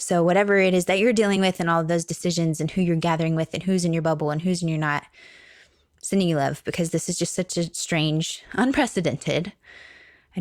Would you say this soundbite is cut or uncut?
uncut